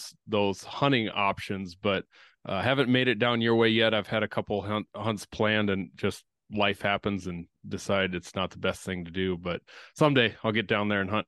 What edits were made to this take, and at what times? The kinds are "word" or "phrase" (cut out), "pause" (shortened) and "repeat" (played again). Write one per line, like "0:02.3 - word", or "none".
none